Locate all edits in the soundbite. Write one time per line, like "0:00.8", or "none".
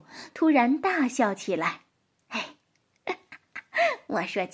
0:01.9